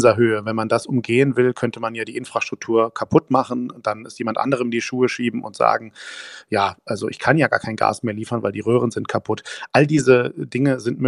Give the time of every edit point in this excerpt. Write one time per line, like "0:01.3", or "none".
none